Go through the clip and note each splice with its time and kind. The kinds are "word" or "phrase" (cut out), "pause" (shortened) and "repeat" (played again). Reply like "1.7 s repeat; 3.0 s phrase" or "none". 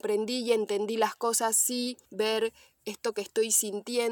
2.1 s pause